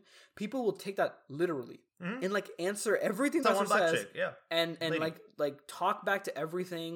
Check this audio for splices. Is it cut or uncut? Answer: cut